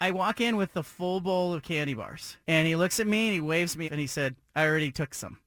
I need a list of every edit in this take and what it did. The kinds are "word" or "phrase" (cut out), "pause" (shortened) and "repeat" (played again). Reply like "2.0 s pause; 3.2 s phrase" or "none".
2.4 s pause; 3.8 s word